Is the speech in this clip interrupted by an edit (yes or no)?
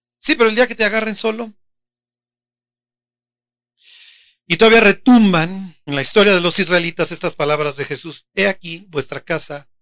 yes